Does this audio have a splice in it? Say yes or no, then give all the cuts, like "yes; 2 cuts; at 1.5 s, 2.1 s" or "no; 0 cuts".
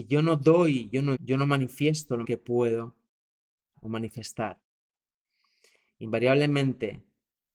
yes; 3 cuts; at 1.2 s, 2.2 s, 3.7 s